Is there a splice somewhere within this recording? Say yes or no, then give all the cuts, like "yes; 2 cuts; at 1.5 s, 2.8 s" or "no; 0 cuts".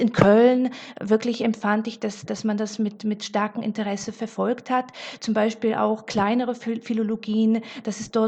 yes; 1 cut; at 2.3 s